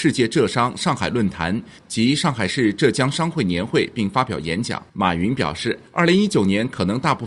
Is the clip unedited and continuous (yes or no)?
no